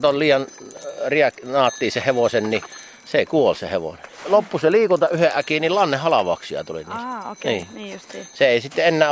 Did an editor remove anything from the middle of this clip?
yes; 1 cut; at 4.1 s

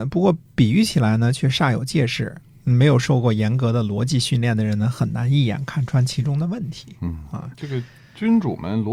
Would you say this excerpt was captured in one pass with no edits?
yes; 0 cuts

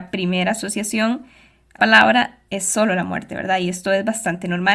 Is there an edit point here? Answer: yes; 2 cuts; at 1.8 s, 2.5 s

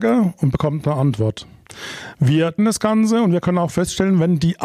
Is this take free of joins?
no; 1 cut; at 2.6 s

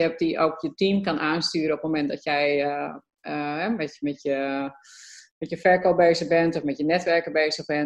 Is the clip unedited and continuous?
yes; 0 cuts

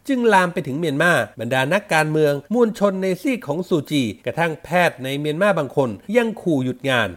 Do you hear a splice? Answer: yes; 4 cuts; at 1.3 s, 2.4 s, 4.2 s, 6.0 s

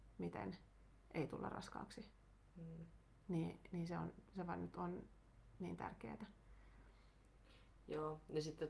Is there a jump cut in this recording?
no; 0 cuts

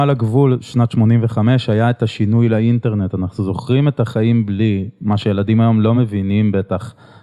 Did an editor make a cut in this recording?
no; 0 cuts

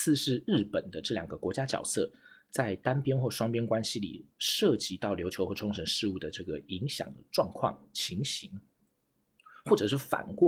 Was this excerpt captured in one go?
yes; 0 cuts

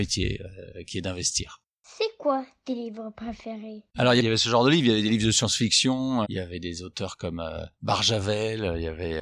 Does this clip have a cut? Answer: yes; 2 cuts; at 3.9 s, 6.2 s

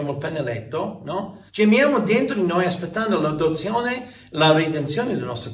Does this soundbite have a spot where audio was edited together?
yes; 1 cut; at 1.5 s

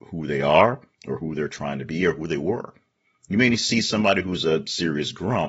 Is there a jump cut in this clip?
no; 0 cuts

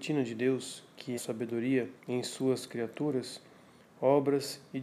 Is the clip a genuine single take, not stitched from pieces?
no; 2 cuts; at 1.1 s, 2.0 s

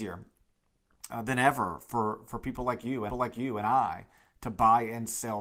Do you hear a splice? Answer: yes; 1 cut; at 3.1 s

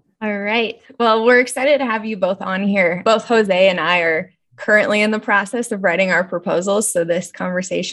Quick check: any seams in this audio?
no; 0 cuts

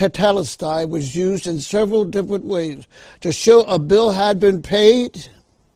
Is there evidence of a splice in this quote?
no; 0 cuts

